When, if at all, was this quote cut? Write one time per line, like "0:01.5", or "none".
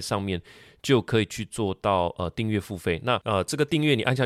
none